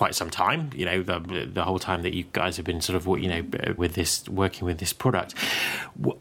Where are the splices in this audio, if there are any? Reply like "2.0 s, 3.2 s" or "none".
3.8 s

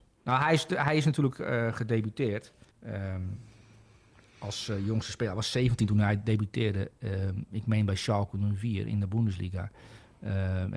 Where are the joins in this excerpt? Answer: 2.7 s

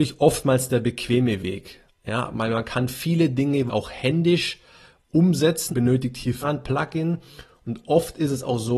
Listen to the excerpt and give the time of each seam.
3.7 s, 5.7 s, 6.4 s

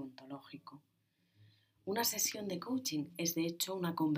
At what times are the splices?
none

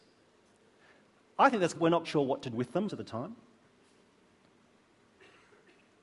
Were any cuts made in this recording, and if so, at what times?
1.7 s, 2.0 s, 2.5 s, 2.9 s

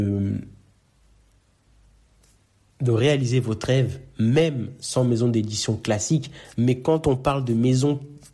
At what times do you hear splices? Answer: none

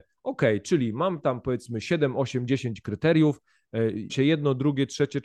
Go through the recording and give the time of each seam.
4.1 s

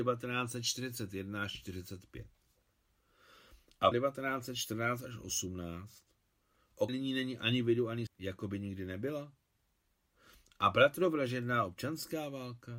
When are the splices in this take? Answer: 3.9 s, 6.9 s, 8.1 s

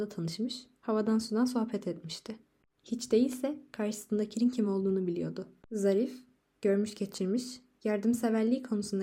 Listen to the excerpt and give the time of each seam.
none

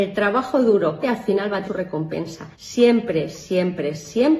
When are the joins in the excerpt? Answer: 1.0 s, 1.6 s, 2.5 s

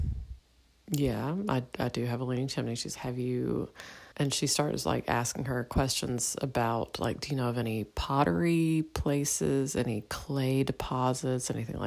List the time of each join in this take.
3.0 s, 4.1 s

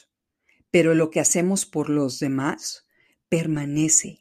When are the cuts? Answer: none

